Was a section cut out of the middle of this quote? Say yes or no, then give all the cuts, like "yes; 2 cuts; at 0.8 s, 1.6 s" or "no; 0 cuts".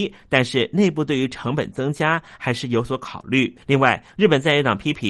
yes; 1 cut; at 3.6 s